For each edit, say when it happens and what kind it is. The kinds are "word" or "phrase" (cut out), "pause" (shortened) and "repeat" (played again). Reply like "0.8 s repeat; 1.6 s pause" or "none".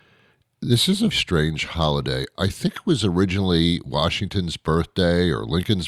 1.1 s word